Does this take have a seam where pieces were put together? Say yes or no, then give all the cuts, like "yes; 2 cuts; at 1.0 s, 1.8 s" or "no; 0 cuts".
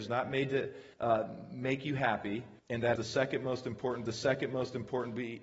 yes; 4 cuts; at 0.9 s, 2.6 s, 3.0 s, 4.1 s